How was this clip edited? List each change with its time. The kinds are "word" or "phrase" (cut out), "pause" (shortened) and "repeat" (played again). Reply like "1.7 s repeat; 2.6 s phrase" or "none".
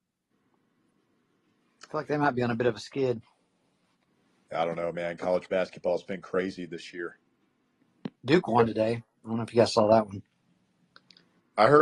8.2 s pause